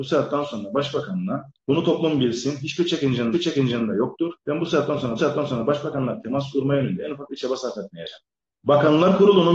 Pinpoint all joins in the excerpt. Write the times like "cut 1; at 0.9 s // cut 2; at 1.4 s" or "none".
cut 1; at 1.6 s // cut 2; at 3.3 s // cut 3; at 4.4 s // cut 4; at 5.2 s // cut 5; at 8.3 s